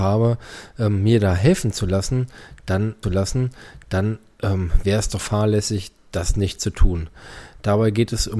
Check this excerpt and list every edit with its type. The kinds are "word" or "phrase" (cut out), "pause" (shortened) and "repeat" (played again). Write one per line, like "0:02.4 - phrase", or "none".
0:03.0 - repeat
0:05.2 - word

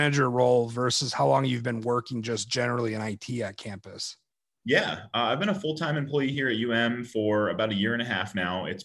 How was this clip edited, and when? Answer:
none

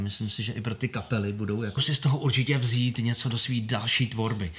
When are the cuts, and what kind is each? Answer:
0:01.8 - phrase

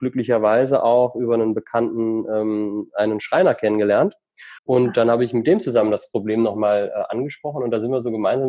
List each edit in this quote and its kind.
0:04.6 - pause

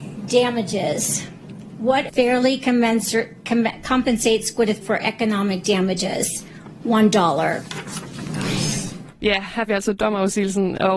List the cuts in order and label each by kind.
0:02.1 - word
0:04.8 - word
0:09.7 - word

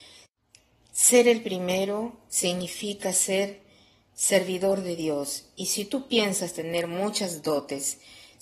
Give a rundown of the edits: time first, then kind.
none

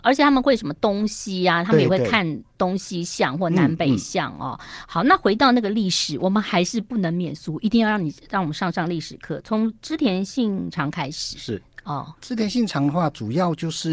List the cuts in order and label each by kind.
0:12.2 - pause

